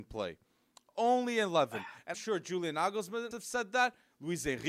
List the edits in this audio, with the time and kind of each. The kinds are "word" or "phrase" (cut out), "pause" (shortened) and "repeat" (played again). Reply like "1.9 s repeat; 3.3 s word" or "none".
2.1 s word; 3.3 s word